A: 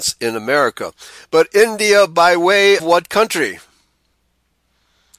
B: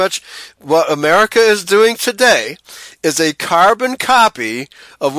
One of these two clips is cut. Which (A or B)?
A